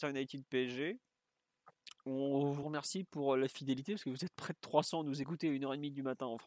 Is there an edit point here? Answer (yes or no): no